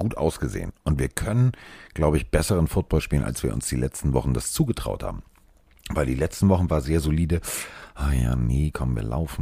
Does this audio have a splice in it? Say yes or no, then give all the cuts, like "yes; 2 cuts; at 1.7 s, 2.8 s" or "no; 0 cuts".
no; 0 cuts